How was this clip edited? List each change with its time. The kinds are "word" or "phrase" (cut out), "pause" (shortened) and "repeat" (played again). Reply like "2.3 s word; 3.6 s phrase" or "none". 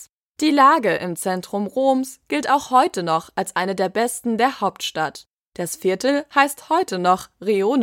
none